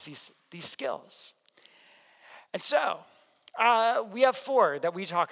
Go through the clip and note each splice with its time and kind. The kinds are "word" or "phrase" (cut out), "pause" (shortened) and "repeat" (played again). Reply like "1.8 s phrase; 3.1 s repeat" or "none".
none